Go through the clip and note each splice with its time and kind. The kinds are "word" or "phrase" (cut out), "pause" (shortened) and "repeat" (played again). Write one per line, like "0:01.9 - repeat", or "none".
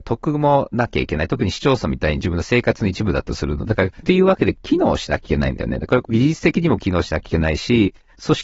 0:04.0 - phrase

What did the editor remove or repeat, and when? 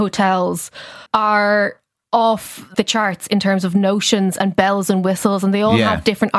0:01.1 - pause
0:02.7 - word

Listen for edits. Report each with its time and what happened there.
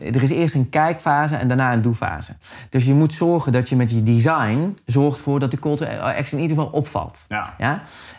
none

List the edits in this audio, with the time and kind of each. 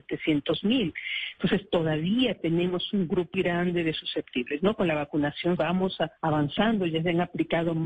0:03.3 - word
0:05.6 - word
0:06.2 - pause

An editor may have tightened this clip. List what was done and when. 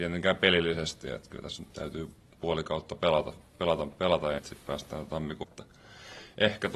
0:01.7 - pause
0:04.4 - word
0:05.4 - phrase

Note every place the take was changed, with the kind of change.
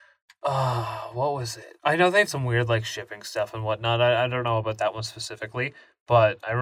0:01.8 - pause
0:02.3 - word

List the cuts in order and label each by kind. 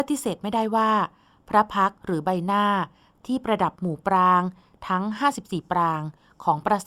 0:02.0 - pause

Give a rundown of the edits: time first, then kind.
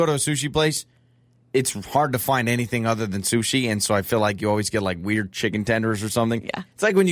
none

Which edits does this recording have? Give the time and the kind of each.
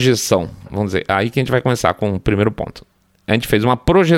none

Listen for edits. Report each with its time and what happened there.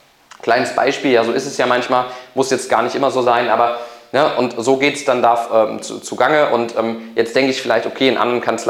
none

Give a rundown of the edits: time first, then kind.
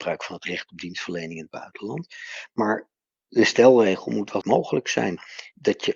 0:04.4 - phrase

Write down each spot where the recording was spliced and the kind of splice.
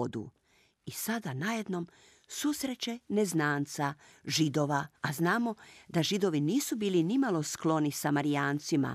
0:05.0 - pause

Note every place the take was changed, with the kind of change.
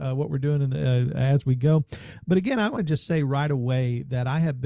0:02.8 - word

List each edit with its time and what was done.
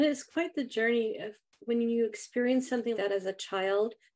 0:02.9 - word

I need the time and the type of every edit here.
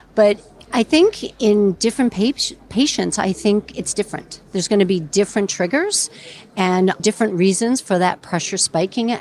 0:07.0 - word

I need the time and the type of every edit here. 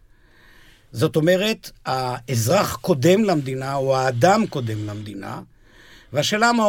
none

